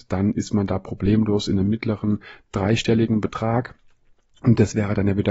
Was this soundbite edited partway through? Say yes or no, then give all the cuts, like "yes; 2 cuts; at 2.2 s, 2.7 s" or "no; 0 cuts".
no; 0 cuts